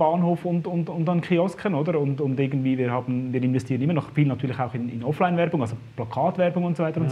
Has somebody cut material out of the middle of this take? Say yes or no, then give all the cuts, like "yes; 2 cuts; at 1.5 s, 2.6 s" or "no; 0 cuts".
no; 0 cuts